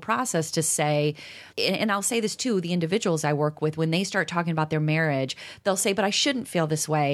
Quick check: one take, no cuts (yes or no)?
no